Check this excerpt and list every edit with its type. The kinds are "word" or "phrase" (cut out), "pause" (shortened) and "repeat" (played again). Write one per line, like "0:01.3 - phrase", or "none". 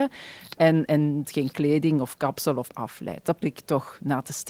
0:01.2 - word
0:02.7 - word
0:03.4 - word